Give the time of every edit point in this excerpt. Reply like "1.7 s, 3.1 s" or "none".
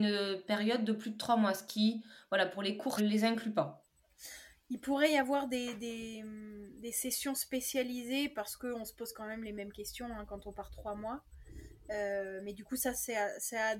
3.0 s